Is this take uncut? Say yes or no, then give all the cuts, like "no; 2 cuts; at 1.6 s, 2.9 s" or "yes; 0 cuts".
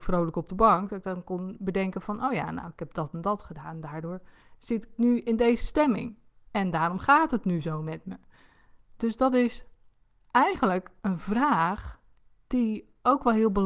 yes; 0 cuts